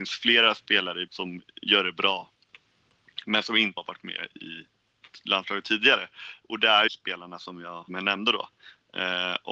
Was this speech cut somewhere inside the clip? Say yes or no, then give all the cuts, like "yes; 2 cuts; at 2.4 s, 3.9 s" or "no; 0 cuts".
yes; 4 cuts; at 1.1 s, 3.8 s, 6.9 s, 7.9 s